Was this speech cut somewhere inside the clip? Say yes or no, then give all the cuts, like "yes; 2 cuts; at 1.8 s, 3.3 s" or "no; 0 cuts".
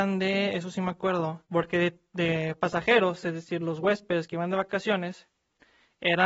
yes; 1 cut; at 1.5 s